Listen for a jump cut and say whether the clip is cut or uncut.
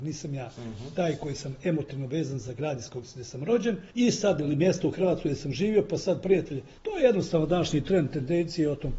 cut